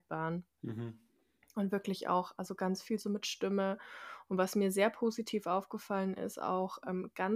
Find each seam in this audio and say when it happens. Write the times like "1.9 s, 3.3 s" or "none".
none